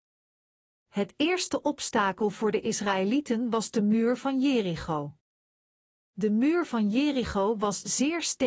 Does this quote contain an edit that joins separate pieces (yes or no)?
no